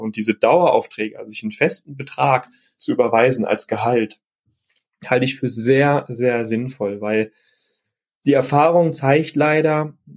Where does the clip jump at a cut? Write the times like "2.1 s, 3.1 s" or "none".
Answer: none